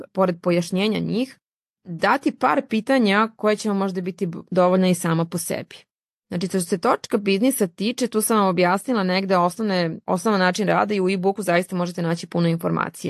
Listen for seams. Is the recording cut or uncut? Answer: uncut